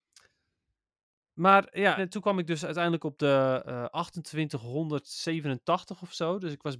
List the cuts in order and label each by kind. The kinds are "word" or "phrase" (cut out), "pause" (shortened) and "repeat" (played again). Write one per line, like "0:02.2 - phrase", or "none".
0:02.0 - word